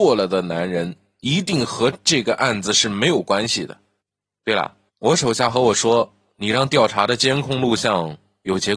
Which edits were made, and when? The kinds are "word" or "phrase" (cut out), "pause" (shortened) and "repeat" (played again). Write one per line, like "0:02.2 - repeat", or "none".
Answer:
none